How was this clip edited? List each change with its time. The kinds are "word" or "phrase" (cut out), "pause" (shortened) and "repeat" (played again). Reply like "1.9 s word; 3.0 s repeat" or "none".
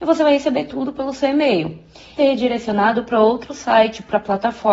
2.2 s phrase